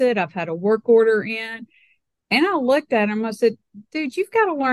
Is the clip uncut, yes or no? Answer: yes